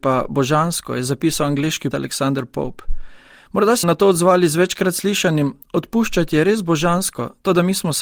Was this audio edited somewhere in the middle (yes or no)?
yes